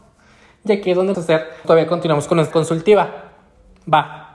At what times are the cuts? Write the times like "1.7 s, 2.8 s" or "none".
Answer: 1.1 s, 1.6 s, 2.5 s